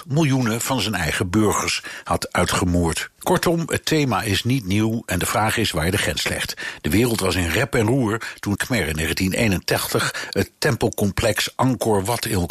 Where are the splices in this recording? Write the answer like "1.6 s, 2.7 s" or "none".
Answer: 3.2 s, 8.6 s